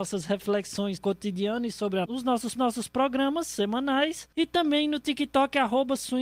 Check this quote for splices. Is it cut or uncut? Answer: cut